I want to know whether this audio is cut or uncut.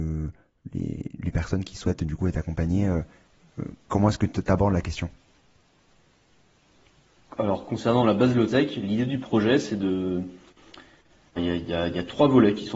cut